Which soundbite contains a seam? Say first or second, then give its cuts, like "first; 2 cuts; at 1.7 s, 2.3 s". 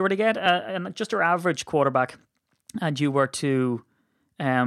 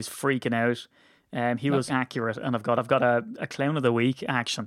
second; 2 cuts; at 1.9 s, 2.8 s